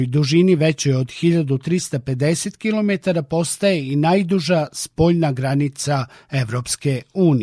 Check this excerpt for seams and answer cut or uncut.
uncut